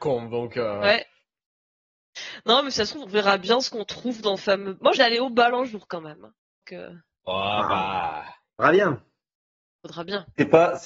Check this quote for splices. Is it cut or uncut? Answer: cut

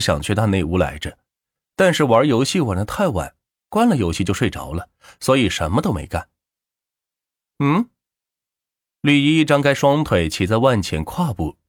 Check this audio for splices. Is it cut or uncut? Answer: uncut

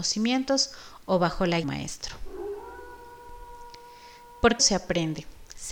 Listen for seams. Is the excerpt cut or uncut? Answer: cut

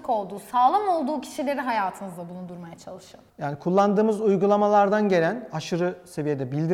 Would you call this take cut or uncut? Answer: uncut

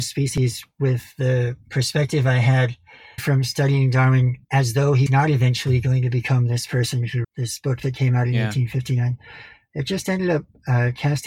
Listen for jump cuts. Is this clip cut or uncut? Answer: cut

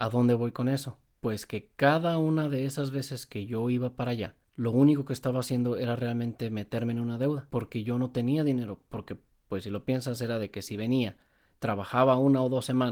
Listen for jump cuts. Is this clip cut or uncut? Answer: uncut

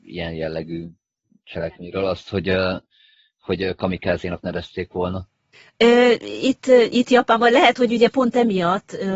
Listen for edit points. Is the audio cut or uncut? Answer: uncut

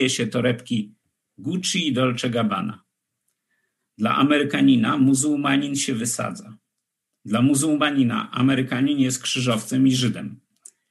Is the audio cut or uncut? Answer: uncut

